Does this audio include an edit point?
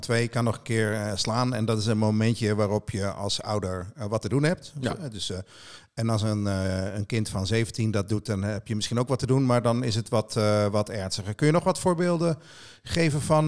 no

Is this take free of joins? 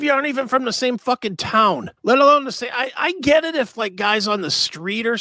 no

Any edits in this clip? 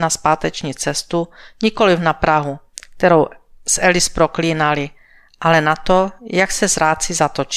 no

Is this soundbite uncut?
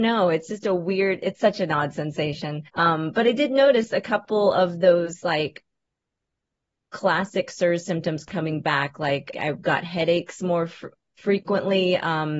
no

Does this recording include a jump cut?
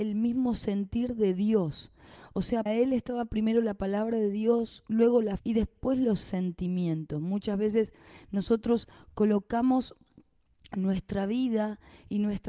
yes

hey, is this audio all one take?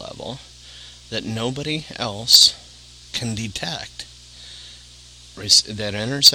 no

